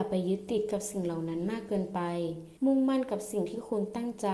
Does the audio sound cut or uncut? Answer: cut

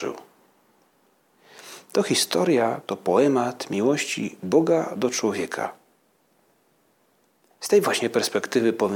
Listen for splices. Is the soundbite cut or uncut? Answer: uncut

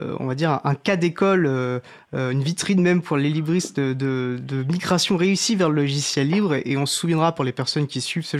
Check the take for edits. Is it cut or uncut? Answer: uncut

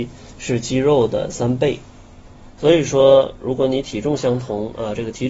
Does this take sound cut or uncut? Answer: uncut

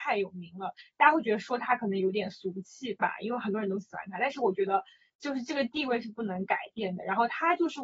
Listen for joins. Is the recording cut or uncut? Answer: uncut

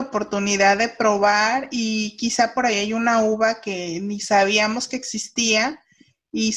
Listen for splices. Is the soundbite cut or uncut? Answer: uncut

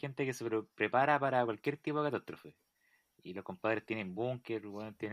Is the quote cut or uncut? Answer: uncut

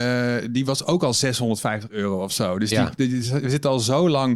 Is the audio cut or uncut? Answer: uncut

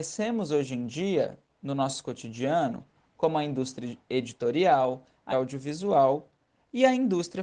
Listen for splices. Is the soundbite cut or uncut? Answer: cut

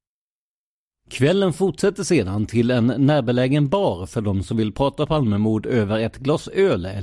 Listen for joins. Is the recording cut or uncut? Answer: uncut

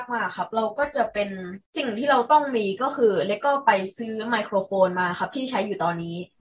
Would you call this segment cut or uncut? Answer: cut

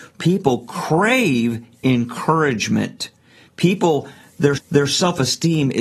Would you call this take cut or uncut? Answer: cut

